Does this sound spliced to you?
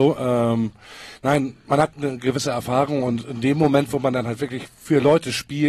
no; 0 cuts

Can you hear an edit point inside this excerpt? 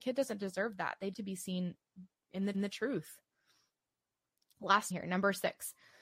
yes; 4 cuts; at 1.1 s, 2.1 s, 2.5 s, 4.9 s

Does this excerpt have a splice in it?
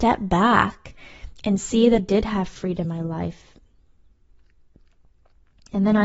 yes; 2 cuts; at 2.0 s, 2.8 s

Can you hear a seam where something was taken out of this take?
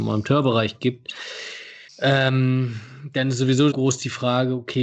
yes; 2 cuts; at 1.9 s, 3.7 s

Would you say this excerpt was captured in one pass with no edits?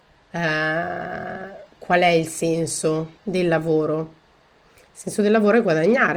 no; 2 cuts; at 1.7 s, 3.2 s

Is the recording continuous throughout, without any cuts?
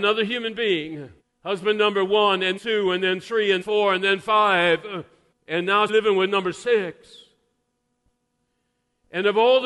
no; 5 cuts; at 1.2 s, 2.6 s, 3.6 s, 5.3 s, 5.9 s

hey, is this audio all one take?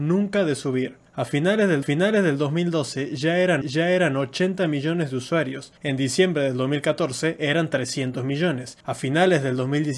no; 5 cuts; at 1.1 s, 1.8 s, 3.6 s, 5.8 s, 8.8 s

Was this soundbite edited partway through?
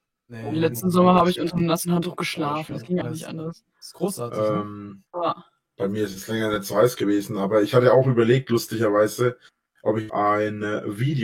yes; 3 cuts; at 3.0 s, 5.1 s, 10.1 s

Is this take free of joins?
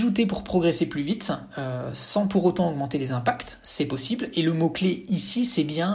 yes; 0 cuts

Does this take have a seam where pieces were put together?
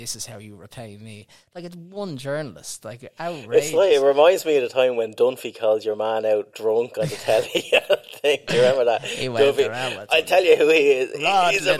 no; 0 cuts

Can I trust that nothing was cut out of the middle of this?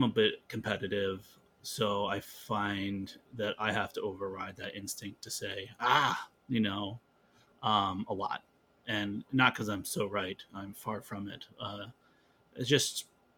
yes; 0 cuts

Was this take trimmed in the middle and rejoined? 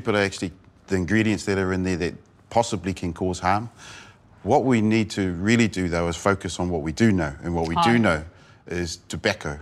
no; 0 cuts

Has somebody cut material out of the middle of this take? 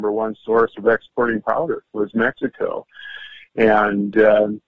no; 0 cuts

